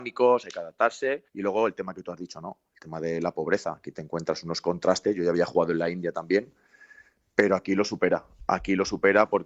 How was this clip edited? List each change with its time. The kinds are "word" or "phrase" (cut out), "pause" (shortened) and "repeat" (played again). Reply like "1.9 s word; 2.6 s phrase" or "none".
1.3 s pause